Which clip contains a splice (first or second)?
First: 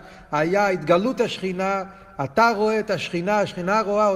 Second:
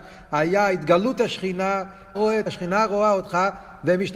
second